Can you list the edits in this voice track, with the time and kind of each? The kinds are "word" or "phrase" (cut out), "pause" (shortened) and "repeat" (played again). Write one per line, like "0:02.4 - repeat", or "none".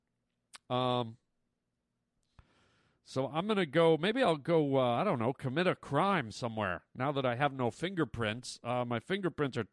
none